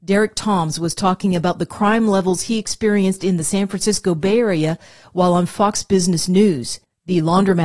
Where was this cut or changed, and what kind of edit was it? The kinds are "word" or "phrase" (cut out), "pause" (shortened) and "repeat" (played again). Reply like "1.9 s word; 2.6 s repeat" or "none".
none